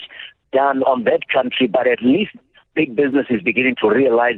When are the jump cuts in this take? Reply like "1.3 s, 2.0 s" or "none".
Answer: none